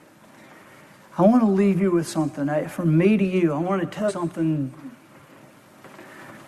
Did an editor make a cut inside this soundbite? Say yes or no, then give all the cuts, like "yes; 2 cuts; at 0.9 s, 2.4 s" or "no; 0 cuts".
yes; 1 cut; at 4.1 s